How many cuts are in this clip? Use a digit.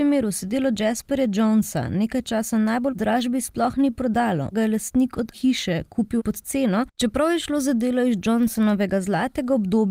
5